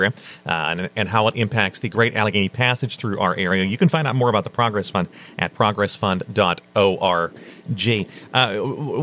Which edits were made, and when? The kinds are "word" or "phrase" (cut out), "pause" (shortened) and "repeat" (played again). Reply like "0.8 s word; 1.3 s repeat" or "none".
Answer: none